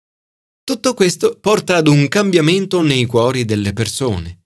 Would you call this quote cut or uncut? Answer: uncut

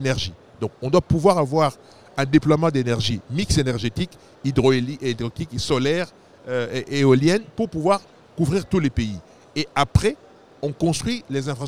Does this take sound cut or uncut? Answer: uncut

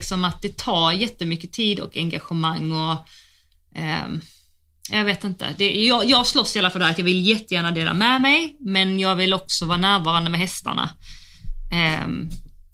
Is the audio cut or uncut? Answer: uncut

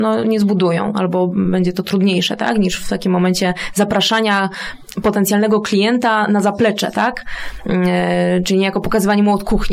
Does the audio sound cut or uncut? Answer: uncut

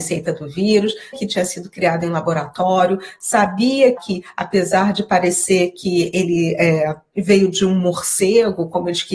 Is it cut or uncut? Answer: cut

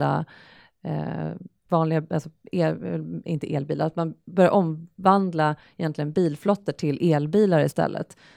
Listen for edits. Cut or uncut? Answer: uncut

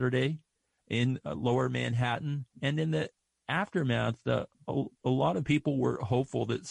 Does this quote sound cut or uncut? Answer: cut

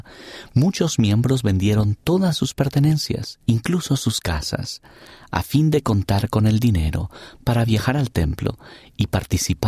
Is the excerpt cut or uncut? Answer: cut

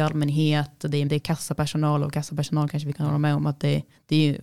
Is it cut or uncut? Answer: cut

